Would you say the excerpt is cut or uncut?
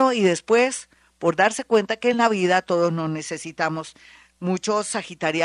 uncut